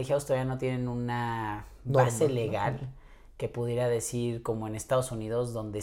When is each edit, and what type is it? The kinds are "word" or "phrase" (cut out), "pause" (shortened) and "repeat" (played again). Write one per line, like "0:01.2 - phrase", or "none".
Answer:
none